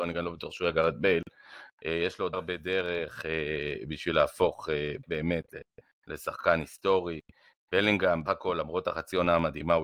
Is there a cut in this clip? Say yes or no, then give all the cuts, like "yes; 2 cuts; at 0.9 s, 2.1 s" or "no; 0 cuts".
yes; 3 cuts; at 2.3 s, 5.0 s, 8.3 s